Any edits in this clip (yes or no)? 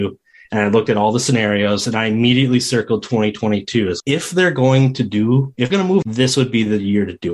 yes